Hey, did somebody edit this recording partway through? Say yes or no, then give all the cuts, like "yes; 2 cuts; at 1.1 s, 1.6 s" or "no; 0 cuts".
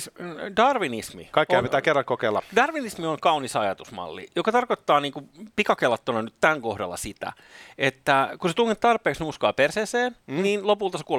no; 0 cuts